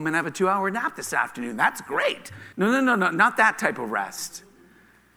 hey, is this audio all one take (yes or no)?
no